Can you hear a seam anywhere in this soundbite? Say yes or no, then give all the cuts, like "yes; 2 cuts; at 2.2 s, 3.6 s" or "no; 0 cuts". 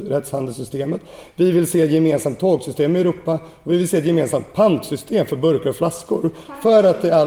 no; 0 cuts